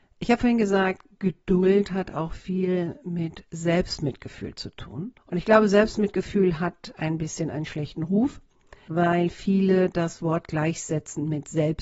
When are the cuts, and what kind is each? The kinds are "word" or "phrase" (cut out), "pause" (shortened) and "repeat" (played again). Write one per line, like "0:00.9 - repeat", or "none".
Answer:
0:05.2 - pause